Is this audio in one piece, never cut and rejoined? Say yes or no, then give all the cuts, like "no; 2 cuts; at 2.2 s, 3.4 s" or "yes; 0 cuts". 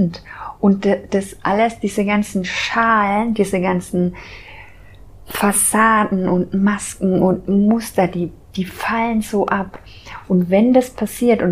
no; 1 cut; at 8.4 s